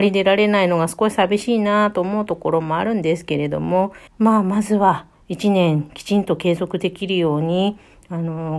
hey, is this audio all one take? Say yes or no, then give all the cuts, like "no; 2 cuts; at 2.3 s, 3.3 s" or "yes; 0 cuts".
no; 1 cut; at 4.1 s